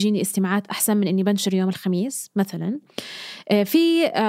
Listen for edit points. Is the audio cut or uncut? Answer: uncut